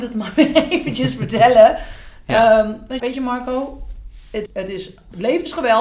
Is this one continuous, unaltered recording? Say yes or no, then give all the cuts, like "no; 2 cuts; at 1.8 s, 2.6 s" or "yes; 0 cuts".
no; 2 cuts; at 3.0 s, 4.5 s